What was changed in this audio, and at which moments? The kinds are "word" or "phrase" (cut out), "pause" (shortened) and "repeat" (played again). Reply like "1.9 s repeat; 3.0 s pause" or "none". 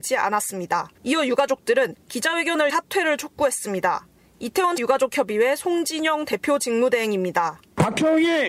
0.9 s pause; 2.7 s phrase; 4.8 s word